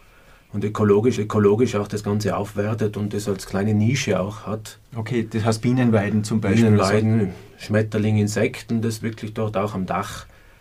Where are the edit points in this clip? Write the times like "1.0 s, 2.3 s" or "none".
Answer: 1.2 s, 4.9 s, 9.0 s